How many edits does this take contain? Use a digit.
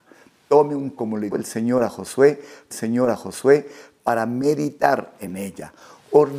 3